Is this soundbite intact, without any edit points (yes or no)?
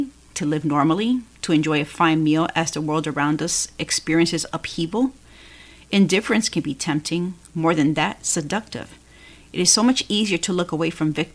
yes